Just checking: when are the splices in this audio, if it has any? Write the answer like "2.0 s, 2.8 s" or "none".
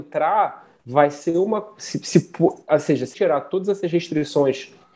3.1 s